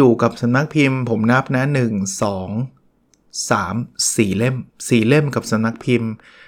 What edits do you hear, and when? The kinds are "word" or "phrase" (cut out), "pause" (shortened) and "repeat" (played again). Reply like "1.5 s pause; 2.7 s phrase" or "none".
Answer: 4.7 s pause